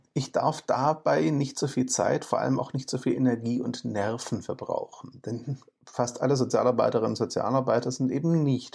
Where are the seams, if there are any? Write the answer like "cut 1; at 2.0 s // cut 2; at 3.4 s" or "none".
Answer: none